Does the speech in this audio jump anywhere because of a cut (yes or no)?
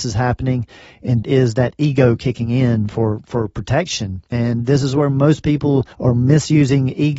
yes